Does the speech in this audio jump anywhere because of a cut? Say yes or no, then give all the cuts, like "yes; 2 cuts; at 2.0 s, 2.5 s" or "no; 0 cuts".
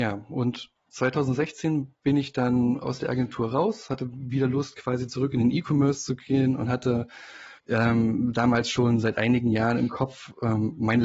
yes; 1 cut; at 7.6 s